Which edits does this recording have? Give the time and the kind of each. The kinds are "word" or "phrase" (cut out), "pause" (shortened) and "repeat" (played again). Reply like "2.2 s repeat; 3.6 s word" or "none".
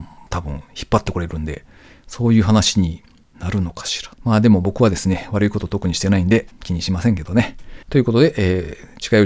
4.1 s pause; 7.8 s pause